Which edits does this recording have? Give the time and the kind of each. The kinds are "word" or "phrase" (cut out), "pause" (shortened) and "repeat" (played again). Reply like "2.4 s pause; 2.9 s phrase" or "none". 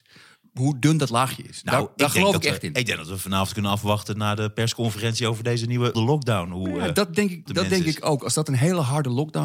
5.9 s word; 7.5 s word